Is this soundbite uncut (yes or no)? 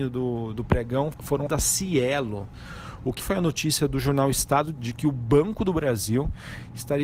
no